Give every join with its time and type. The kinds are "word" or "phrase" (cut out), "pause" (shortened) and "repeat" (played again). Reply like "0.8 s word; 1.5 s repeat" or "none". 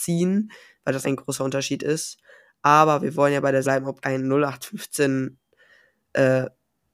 1.0 s word; 3.6 s word; 4.0 s word